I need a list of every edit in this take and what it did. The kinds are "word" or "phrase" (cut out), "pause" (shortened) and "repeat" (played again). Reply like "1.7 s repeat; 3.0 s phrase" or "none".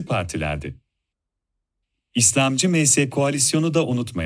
3.1 s word